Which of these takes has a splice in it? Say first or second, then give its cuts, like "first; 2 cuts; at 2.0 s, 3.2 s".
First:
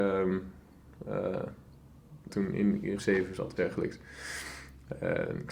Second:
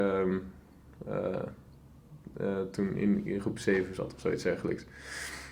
first; 3 cuts; at 2.3 s, 3.0 s, 3.6 s